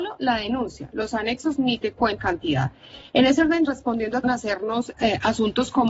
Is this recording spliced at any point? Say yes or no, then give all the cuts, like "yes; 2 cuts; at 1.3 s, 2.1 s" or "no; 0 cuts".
yes; 4 cuts; at 2.2 s, 3.6 s, 4.2 s, 4.9 s